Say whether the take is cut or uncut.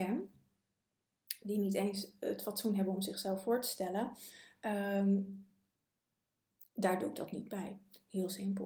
uncut